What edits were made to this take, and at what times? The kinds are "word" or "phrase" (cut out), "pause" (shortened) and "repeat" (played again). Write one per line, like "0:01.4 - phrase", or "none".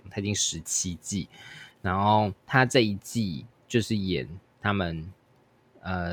0:02.4 - pause